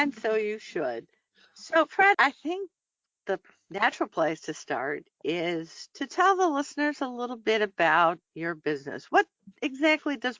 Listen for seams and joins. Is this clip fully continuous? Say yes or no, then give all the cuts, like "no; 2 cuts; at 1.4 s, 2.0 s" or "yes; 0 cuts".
no; 2 cuts; at 2.1 s, 8.3 s